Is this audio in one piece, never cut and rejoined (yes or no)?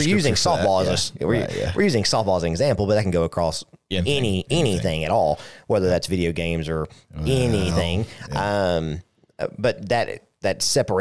yes